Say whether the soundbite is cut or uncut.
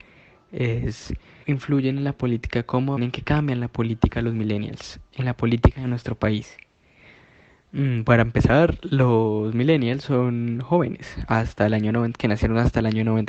cut